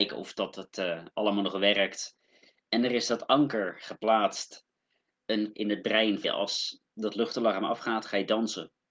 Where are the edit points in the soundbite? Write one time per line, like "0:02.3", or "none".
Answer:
0:05.5
0:06.2